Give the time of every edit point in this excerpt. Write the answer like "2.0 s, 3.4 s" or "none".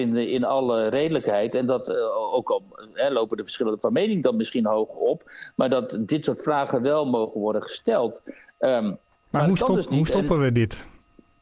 none